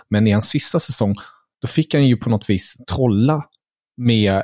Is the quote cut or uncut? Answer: uncut